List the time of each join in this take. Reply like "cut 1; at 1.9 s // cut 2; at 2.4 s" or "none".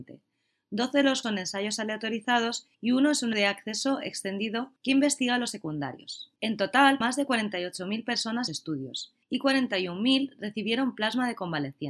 cut 1; at 1.2 s // cut 2; at 2.7 s // cut 3; at 3.3 s // cut 4; at 4.8 s // cut 5; at 5.5 s // cut 6; at 6.4 s // cut 7; at 7.0 s // cut 8; at 8.5 s // cut 9; at 9.2 s